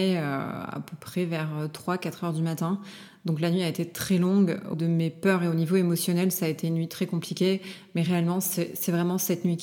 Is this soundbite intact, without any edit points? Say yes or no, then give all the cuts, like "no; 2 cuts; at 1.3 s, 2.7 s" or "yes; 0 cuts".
no; 1 cut; at 4.7 s